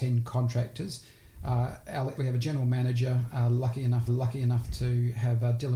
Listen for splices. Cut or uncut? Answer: cut